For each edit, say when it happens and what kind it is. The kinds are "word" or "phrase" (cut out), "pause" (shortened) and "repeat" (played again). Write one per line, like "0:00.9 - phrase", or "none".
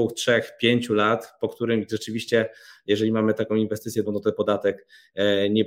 0:04.0 - word